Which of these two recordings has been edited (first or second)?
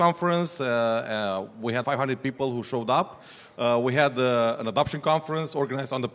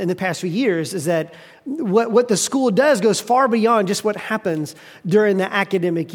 first